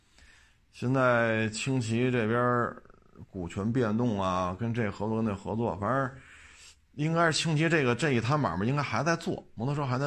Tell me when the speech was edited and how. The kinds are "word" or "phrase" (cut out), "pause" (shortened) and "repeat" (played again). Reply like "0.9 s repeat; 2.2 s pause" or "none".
none